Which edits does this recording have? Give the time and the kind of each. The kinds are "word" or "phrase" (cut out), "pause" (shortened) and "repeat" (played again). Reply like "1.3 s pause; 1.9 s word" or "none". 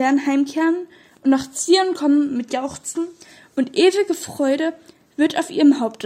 none